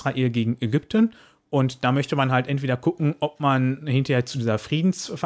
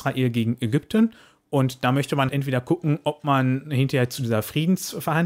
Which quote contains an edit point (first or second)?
second